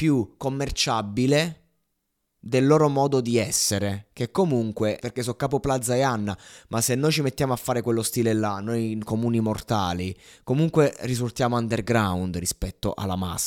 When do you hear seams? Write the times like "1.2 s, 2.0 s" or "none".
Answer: 5.0 s